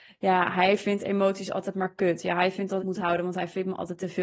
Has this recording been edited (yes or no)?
yes